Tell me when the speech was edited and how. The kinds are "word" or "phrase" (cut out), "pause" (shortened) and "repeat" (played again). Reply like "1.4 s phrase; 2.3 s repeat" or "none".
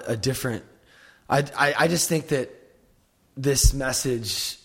none

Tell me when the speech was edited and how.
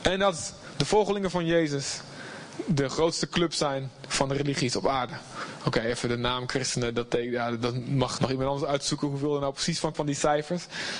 8.2 s word; 9.9 s word

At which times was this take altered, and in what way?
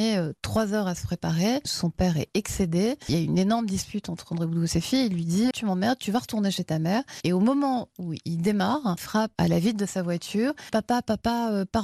5.5 s word; 9.0 s word; 9.4 s word

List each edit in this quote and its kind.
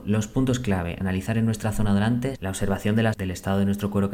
1.0 s word; 2.4 s word; 3.1 s word

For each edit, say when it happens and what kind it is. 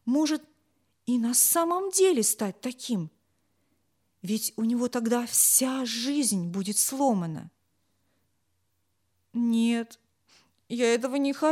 none

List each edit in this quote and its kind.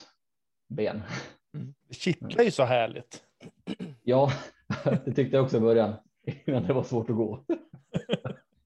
1.4 s pause; 1.8 s pause

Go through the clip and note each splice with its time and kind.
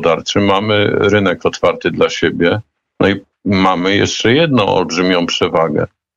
none

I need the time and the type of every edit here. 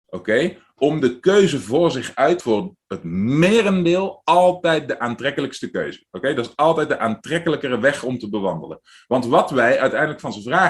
2.4 s phrase

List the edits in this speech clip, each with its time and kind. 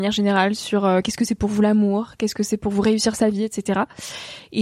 none

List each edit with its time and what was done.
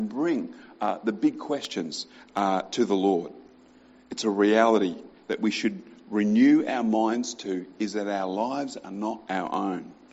none

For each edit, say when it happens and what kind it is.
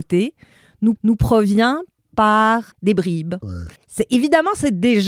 1.0 s repeat; 2.7 s pause; 3.8 s pause

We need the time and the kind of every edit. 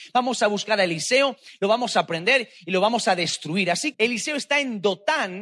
3.9 s word

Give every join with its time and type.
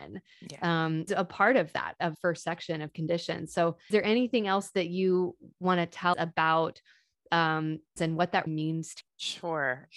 1.1 s word; 2.1 s word; 3.9 s word; 6.1 s word; 8.0 s word; 8.5 s word; 9.0 s word

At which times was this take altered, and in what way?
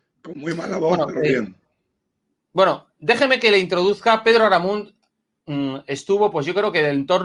none

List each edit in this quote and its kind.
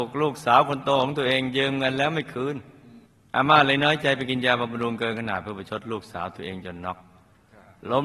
3.1 s pause

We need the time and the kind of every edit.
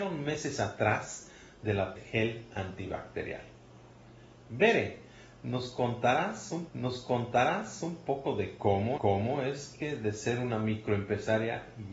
2.0 s phrase; 6.7 s repeat; 9.0 s repeat

